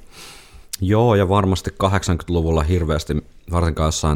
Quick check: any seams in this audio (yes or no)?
no